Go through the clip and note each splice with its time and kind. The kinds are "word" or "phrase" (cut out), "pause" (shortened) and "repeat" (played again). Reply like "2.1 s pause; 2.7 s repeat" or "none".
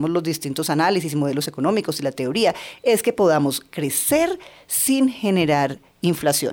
none